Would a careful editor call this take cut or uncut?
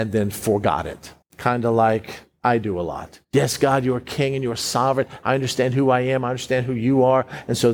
cut